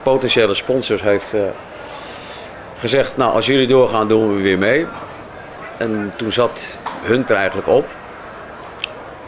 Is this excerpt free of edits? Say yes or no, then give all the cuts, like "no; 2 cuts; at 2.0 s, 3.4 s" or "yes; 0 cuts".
no; 1 cut; at 7.3 s